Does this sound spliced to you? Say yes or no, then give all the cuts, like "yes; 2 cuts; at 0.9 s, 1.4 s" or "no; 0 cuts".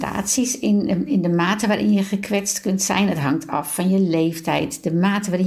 no; 0 cuts